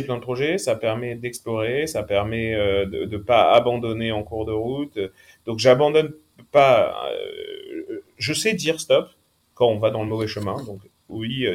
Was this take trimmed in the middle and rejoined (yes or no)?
no